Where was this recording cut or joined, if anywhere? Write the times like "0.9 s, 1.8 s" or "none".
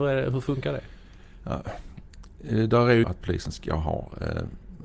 3.0 s